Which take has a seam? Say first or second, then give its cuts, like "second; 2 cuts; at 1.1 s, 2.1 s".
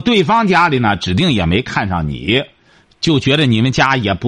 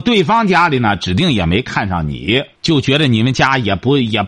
second; 1 cut; at 2.6 s